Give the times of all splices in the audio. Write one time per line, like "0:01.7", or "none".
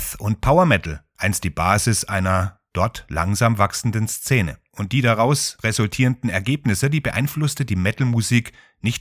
none